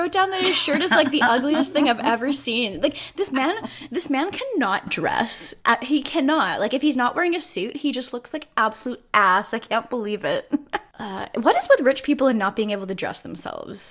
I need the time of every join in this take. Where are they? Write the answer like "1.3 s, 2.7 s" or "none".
none